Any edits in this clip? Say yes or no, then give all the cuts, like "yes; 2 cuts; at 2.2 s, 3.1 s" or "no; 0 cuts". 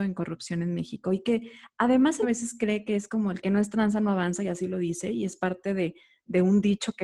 yes; 1 cut; at 2.2 s